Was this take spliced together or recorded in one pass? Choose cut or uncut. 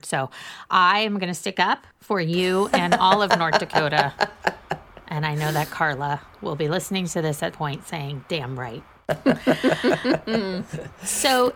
cut